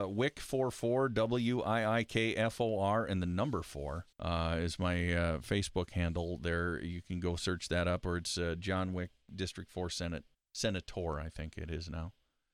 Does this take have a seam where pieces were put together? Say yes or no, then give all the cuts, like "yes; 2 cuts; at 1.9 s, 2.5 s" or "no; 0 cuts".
yes; 2 cuts; at 4.1 s, 10.3 s